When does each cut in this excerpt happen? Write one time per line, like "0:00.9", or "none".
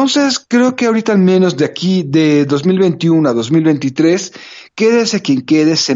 0:04.7

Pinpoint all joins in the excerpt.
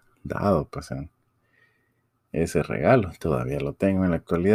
none

